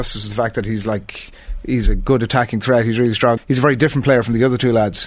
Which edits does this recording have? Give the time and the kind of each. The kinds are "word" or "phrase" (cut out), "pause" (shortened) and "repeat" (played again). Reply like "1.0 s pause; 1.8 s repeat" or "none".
3.4 s phrase